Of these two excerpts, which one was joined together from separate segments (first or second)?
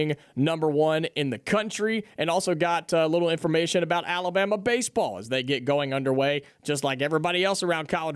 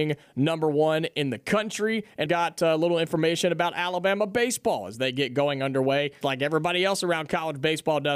second